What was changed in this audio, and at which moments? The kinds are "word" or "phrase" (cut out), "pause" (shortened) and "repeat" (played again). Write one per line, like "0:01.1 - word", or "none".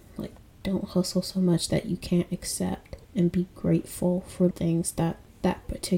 0:03.0 - pause
0:04.5 - word